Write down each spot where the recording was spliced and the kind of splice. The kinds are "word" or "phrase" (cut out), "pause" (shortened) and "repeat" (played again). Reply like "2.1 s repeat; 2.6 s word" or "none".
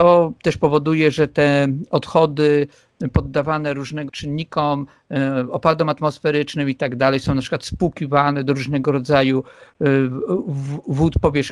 4.1 s word